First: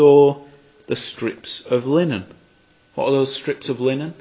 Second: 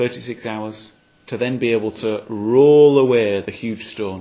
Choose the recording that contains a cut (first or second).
second